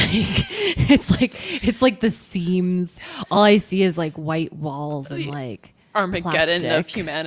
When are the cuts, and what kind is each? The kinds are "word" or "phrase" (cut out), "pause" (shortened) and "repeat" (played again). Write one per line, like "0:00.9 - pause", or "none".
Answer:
none